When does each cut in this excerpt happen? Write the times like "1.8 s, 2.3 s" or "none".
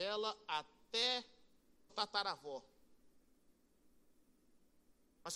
1.9 s